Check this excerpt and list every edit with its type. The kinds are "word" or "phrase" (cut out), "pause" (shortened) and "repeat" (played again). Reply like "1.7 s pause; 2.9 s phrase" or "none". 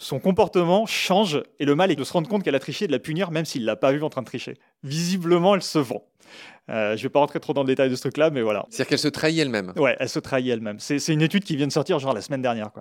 2.0 s word; 4.6 s pause